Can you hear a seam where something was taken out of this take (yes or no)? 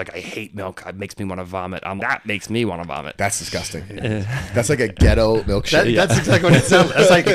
yes